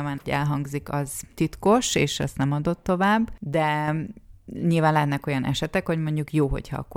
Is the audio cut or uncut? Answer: uncut